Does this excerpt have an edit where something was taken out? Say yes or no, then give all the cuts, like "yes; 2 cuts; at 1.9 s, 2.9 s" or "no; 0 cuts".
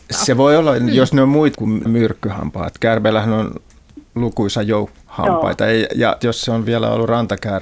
yes; 4 cuts; at 1.5 s, 1.9 s, 4.9 s, 6.2 s